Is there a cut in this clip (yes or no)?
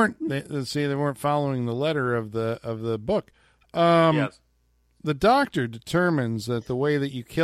no